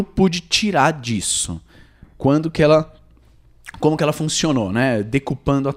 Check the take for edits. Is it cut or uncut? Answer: uncut